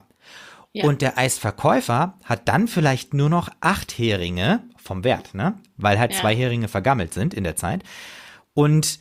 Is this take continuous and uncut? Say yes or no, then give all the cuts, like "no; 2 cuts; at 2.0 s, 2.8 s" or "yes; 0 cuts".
no; 1 cut; at 6.1 s